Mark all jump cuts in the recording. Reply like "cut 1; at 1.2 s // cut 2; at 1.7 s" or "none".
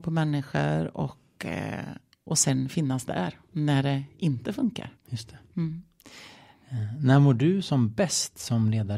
cut 1; at 5.0 s